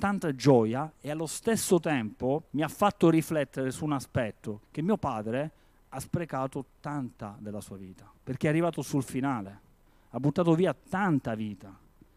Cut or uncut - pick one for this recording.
cut